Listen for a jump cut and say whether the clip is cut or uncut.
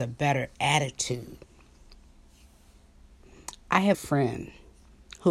cut